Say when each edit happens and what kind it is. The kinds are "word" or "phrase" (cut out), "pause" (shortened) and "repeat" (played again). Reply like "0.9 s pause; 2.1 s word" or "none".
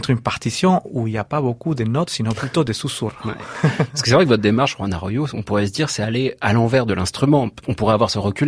none